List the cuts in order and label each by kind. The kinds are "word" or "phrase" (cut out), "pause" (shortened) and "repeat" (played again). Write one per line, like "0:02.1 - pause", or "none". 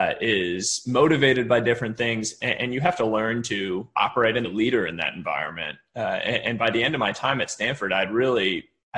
0:04.4 - phrase